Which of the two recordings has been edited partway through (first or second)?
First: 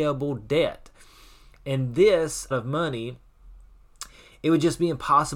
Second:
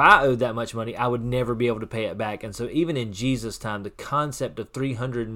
first